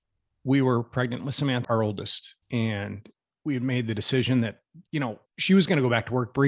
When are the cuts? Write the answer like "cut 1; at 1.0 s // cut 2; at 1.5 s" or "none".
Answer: cut 1; at 1.6 s // cut 2; at 2.4 s // cut 3; at 4.9 s // cut 4; at 5.3 s